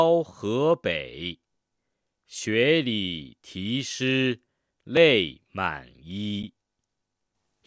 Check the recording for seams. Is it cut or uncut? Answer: uncut